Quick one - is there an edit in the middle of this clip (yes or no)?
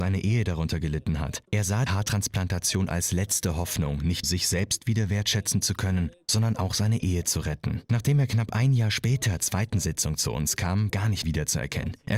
yes